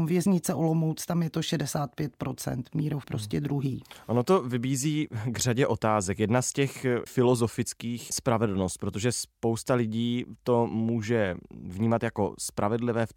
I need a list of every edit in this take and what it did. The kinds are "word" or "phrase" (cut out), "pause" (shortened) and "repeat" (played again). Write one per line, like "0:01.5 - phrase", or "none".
0:03.0 - word
0:07.1 - word
0:08.1 - phrase